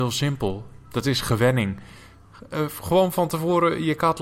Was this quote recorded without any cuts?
yes; 0 cuts

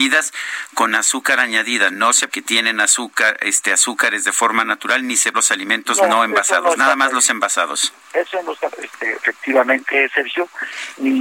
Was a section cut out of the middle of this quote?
yes; 4 cuts; at 2.3 s, 5.3 s, 8.0 s, 8.7 s

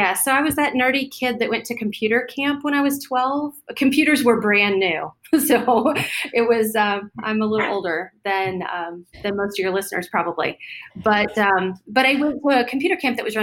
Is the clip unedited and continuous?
yes; 0 cuts

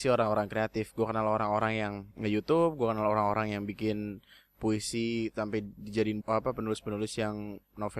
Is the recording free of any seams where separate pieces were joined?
no; 2 cuts; at 2.1 s, 6.2 s

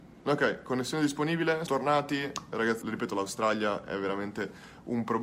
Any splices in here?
yes; 2 cuts; at 1.7 s, 2.8 s

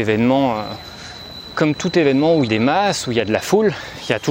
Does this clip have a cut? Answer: yes; 2 cuts; at 1.5 s, 2.5 s

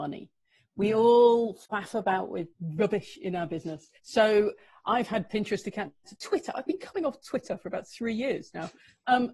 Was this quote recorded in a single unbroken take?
no; 4 cuts; at 1.6 s, 2.5 s, 4.0 s, 6.0 s

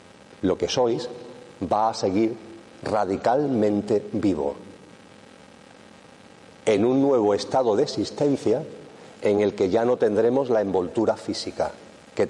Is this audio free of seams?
yes; 0 cuts

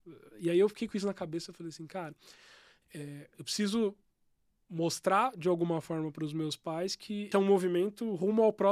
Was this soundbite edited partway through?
yes; 1 cut; at 7.3 s

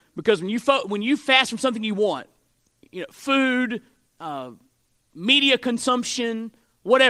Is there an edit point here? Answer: no; 0 cuts

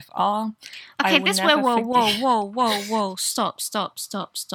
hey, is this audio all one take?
yes; 0 cuts

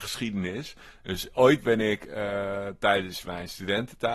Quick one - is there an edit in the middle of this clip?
no; 0 cuts

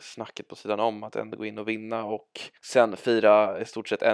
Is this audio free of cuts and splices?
no; 1 cut; at 2.6 s

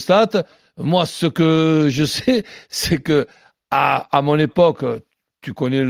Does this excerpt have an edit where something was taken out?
no; 0 cuts

